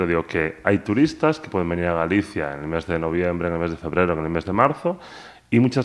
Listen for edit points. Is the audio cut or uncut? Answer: uncut